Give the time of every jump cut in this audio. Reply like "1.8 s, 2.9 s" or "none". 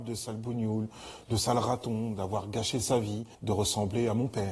3.3 s